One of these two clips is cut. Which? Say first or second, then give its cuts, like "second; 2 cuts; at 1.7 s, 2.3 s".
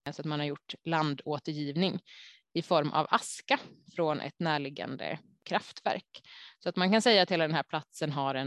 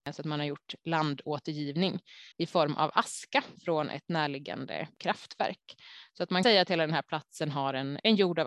second; 4 cuts; at 2.3 s, 3.5 s, 4.9 s, 6.4 s